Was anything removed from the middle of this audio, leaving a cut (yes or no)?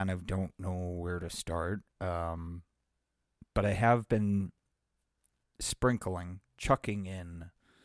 yes